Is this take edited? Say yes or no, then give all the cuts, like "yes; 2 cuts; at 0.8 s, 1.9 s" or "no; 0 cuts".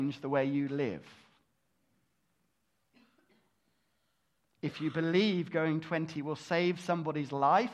no; 0 cuts